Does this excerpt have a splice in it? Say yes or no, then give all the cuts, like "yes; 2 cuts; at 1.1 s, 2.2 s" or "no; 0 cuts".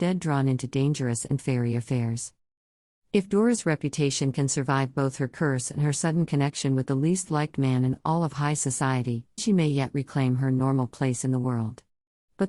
yes; 2 cuts; at 1.4 s, 9.4 s